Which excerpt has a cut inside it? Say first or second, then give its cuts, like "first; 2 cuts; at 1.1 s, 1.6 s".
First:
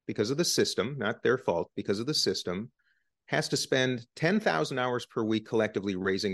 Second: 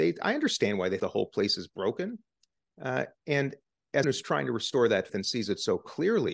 second; 3 cuts; at 1.0 s, 4.0 s, 5.1 s